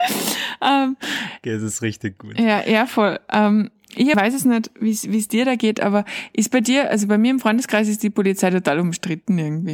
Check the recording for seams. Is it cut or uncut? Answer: cut